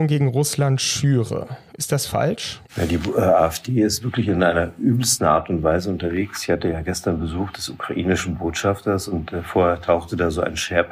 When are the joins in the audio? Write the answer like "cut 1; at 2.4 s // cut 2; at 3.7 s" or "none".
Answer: cut 1; at 2.7 s

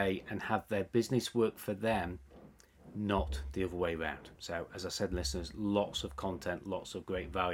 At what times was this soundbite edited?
cut 1; at 4.3 s

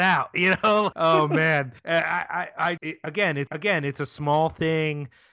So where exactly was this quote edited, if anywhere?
cut 1; at 0.9 s // cut 2; at 1.8 s // cut 3; at 2.8 s // cut 4; at 3.5 s

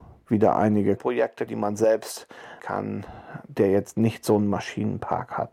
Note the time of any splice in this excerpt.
cut 1; at 1.0 s // cut 2; at 1.5 s // cut 3; at 2.6 s

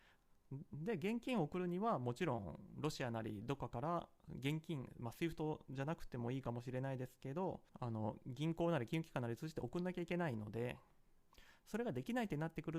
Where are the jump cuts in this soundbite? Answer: cut 1; at 7.7 s

